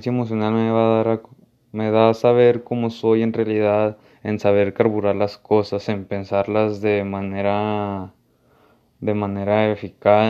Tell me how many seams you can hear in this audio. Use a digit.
0